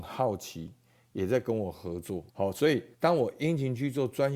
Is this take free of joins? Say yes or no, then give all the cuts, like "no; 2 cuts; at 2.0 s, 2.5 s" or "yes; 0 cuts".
no; 2 cuts; at 2.3 s, 2.9 s